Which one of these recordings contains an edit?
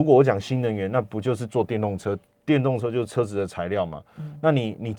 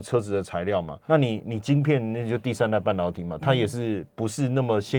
second; 1 cut; at 1.1 s

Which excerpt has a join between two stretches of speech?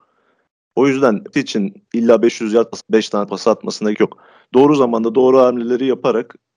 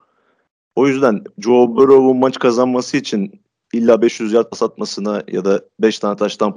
first; 5 cuts; at 1.3 s, 1.9 s, 2.8 s, 3.3 s, 3.9 s

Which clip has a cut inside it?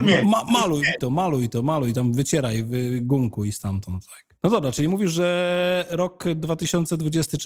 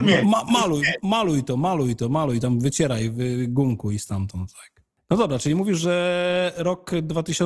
first; 2 cuts; at 1.0 s, 4.4 s

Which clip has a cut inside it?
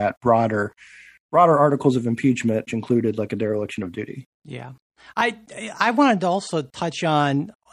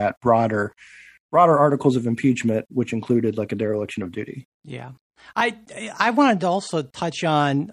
first; 1 cut; at 2.7 s

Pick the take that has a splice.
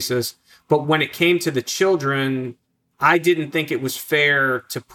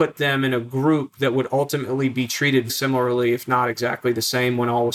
second; 1 cut; at 2.7 s

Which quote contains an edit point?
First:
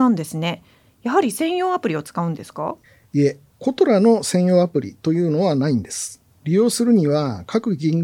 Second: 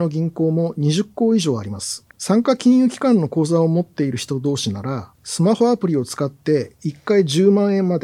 second; 2 cuts; at 2.1 s, 5.1 s

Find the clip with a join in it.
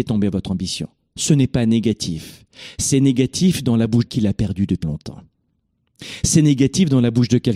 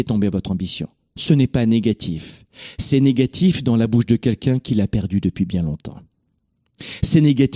first; 2 cuts; at 4.1 s, 4.8 s

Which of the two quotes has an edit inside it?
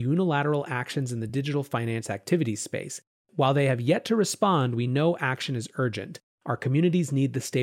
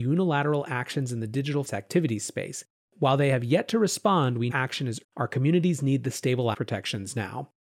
second; 4 cuts; at 1.6 s, 4.5 s, 5.0 s, 6.5 s

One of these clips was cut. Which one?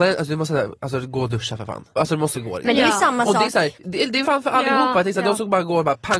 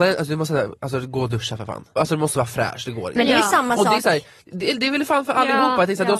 first; 3 cuts; at 2.3 s, 3.7 s, 4.2 s

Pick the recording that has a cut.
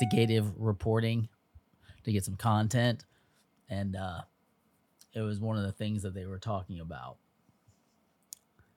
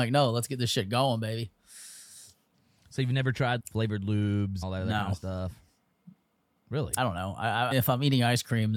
second; 4 cuts; at 3.6 s, 4.6 s, 7.0 s, 7.7 s

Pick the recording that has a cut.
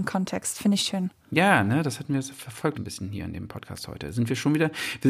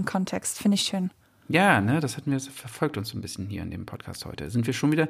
first; 2 cuts; at 1.2 s, 2.7 s

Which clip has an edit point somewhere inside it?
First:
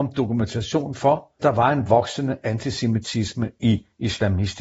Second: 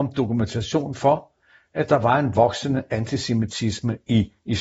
first; 1 cut; at 1.4 s

